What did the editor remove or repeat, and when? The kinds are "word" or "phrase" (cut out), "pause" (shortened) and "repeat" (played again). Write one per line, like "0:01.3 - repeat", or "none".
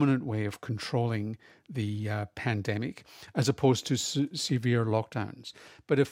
none